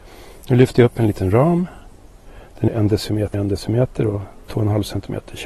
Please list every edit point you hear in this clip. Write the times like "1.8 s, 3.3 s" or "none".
2.7 s, 3.3 s, 4.4 s

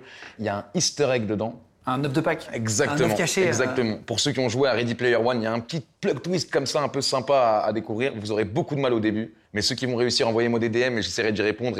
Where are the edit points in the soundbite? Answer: 5.9 s, 9.4 s

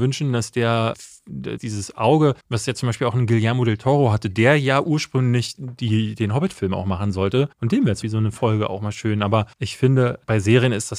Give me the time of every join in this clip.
0.9 s, 1.6 s, 2.4 s, 7.5 s, 8.0 s, 9.5 s

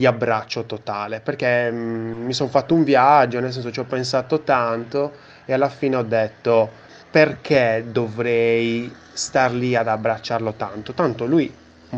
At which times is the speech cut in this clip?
7.0 s

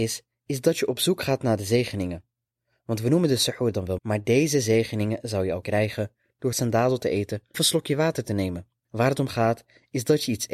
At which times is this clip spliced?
4.0 s, 5.6 s, 6.5 s, 7.5 s

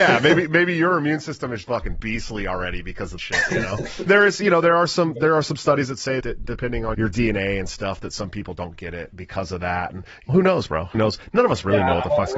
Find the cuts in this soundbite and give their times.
1.6 s, 3.2 s, 4.1 s, 6.2 s, 6.9 s, 9.1 s, 10.3 s, 10.9 s

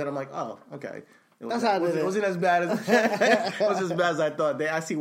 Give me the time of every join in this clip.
none

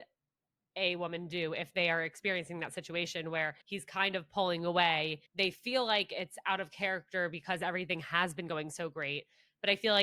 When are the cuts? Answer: 3.6 s, 5.3 s

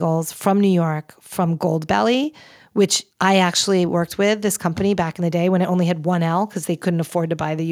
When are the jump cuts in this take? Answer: 3.1 s

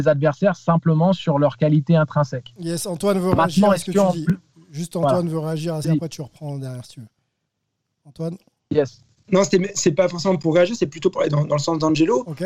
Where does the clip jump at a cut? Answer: 5.8 s

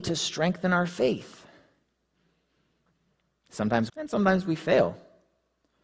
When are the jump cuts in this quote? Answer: 3.9 s

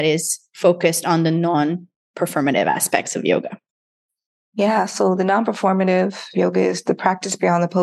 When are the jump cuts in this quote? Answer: none

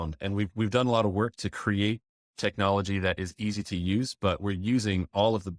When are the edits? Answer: none

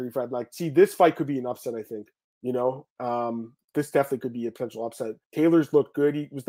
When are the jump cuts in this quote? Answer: 2.1 s, 5.2 s

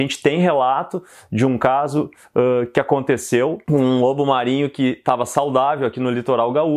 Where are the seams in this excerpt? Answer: none

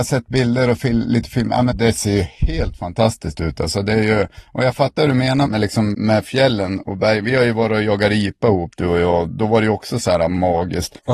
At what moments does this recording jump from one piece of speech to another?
1.7 s, 5.5 s, 5.9 s

